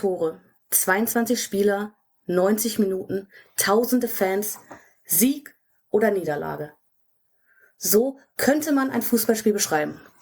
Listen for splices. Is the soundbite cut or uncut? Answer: uncut